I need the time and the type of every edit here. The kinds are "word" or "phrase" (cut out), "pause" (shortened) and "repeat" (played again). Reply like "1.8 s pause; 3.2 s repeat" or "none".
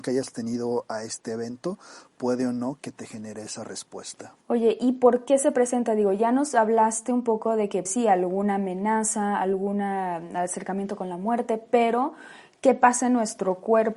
4.4 s pause; 7.9 s word